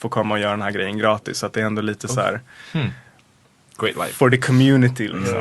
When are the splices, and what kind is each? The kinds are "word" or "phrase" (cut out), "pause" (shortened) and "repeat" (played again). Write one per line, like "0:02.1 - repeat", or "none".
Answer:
none